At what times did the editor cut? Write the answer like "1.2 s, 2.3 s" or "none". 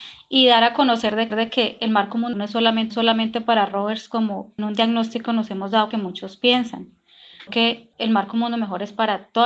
1.3 s, 2.3 s, 2.9 s, 4.6 s, 5.9 s, 7.5 s, 7.9 s